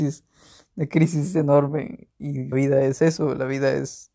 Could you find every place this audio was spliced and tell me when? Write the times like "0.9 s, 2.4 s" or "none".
2.5 s

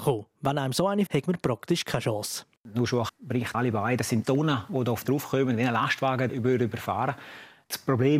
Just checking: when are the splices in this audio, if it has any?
1.1 s, 3.1 s, 3.5 s, 4.2 s, 5.0 s, 6.3 s

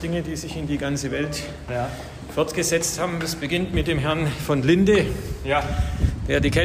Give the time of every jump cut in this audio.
none

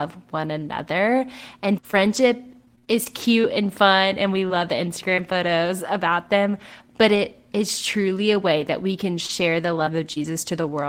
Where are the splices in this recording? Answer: 1.8 s

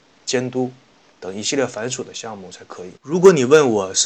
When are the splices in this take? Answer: 3.0 s

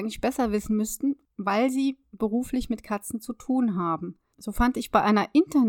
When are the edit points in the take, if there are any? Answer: none

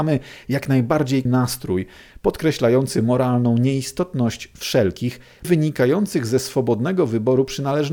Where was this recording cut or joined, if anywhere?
1.3 s, 5.4 s

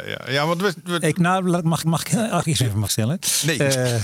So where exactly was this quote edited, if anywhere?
1.1 s, 1.8 s, 2.4 s, 2.9 s

